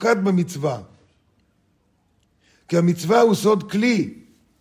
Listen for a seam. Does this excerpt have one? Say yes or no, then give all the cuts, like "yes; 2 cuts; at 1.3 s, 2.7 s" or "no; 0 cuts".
no; 0 cuts